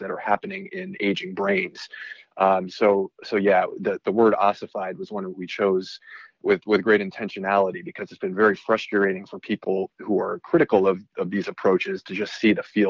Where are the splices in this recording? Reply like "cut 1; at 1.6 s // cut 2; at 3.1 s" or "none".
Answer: none